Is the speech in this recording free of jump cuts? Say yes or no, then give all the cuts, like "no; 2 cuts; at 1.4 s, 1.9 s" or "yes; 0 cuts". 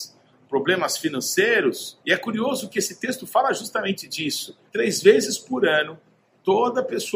no; 2 cuts; at 2.0 s, 4.7 s